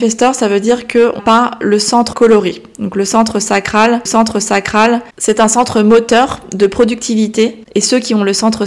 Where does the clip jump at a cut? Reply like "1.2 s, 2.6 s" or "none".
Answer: 1.2 s, 2.1 s, 4.1 s